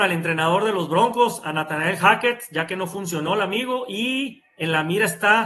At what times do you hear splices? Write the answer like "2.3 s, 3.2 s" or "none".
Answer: none

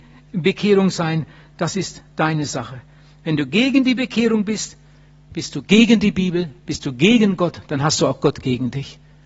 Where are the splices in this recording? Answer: none

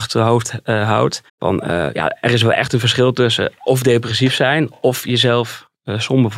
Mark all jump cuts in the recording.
1.3 s

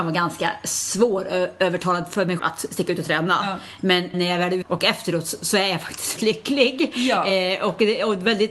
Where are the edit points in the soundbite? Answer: 2.4 s, 4.1 s, 4.6 s, 6.2 s

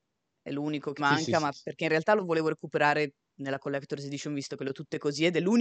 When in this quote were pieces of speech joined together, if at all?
1.0 s

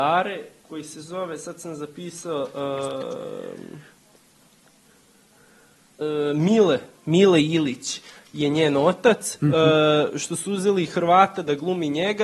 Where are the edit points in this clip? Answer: none

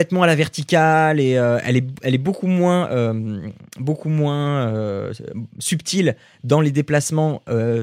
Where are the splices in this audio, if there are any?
none

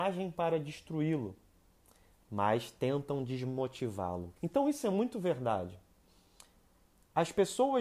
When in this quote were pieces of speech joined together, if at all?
4.4 s

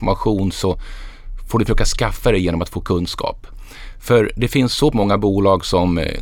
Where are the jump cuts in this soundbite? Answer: 4.9 s

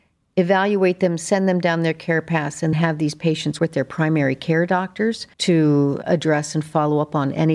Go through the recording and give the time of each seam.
2.7 s, 3.6 s, 5.3 s

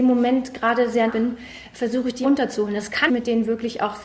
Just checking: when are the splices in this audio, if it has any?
1.1 s, 2.2 s, 3.1 s

